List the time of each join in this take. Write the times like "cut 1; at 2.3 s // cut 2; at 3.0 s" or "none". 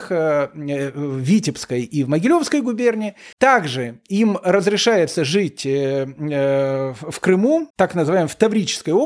cut 1; at 3.3 s // cut 2; at 7.7 s